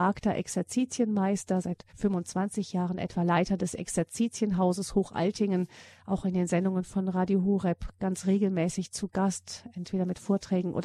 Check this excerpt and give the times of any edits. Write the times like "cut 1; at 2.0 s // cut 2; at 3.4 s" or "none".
cut 1; at 1.9 s